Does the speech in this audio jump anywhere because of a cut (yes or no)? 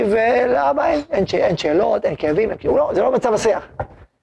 no